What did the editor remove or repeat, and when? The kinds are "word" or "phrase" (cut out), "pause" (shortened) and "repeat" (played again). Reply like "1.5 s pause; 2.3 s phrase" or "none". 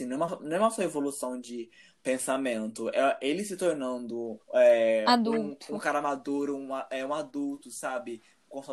4.4 s pause

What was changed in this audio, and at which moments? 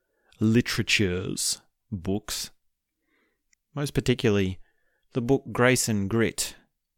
3.5 s phrase

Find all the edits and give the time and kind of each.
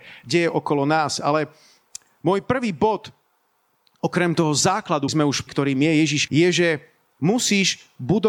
5.1 s word; 5.5 s word; 6.3 s word

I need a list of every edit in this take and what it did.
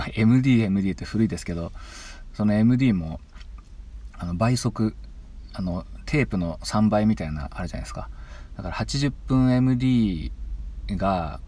none

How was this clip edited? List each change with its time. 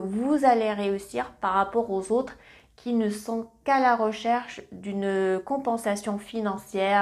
none

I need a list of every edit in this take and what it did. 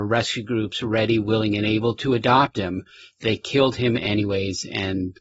none

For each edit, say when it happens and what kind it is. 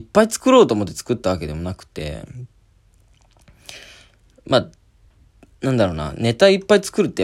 none

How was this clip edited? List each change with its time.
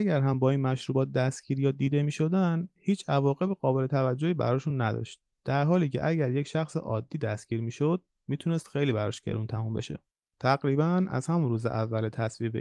10.1 s pause

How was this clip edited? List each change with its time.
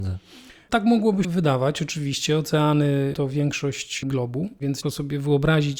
1.2 s word; 4.0 s word; 4.8 s word

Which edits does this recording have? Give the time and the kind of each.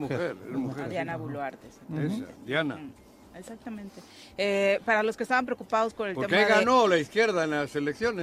none

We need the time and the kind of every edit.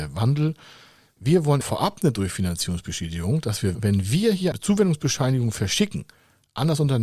1.6 s word; 3.7 s word; 4.5 s word

